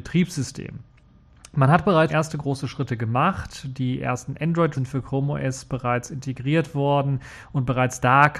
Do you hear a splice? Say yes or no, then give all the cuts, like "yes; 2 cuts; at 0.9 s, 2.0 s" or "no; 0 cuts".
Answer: yes; 2 cuts; at 2.1 s, 4.7 s